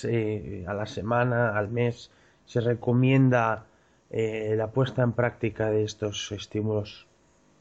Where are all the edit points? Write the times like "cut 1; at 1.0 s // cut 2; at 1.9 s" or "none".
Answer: none